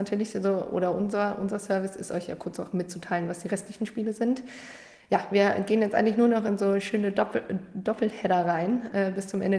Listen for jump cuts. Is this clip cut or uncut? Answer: uncut